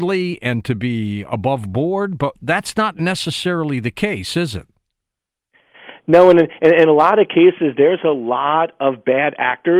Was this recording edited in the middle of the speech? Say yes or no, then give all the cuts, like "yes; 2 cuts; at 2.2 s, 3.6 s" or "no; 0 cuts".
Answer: no; 0 cuts